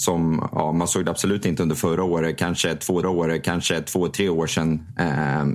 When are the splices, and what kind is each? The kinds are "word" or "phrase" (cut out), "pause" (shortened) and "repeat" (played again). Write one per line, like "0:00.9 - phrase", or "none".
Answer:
0:03.0 - repeat